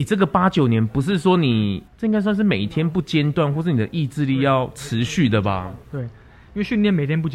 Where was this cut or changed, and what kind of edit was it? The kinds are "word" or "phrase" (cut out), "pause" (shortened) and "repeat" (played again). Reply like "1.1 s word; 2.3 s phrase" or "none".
1.9 s pause